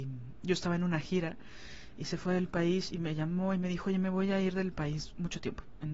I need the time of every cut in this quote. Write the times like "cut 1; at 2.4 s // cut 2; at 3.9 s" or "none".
none